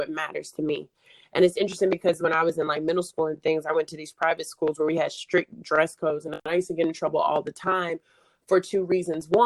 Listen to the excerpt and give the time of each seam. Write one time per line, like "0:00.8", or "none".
none